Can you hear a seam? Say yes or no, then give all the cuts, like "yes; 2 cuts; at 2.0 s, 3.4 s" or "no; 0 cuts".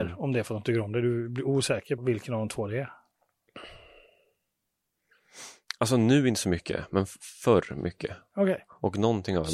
yes; 1 cut; at 2.0 s